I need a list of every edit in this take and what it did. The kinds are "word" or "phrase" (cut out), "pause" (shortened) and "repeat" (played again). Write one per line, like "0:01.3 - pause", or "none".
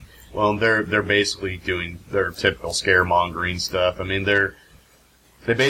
none